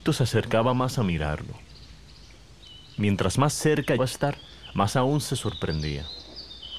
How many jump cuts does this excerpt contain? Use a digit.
1